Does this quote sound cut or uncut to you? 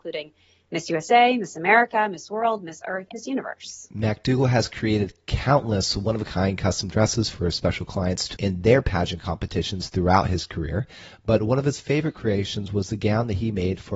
cut